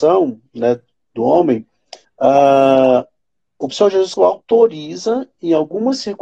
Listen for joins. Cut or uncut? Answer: cut